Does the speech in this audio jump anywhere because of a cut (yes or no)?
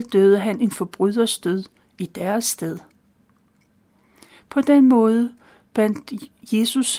no